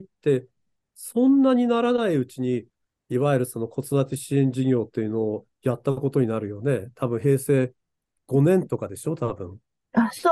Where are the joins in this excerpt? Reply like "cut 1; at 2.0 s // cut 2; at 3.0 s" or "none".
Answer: none